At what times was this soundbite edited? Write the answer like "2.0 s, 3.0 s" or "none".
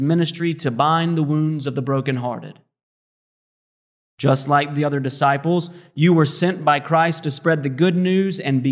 none